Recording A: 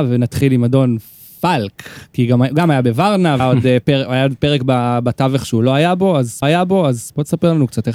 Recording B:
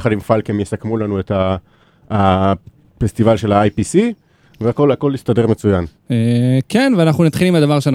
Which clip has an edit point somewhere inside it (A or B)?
A